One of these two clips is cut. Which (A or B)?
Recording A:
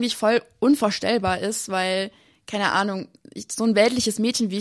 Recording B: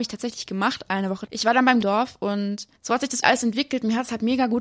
B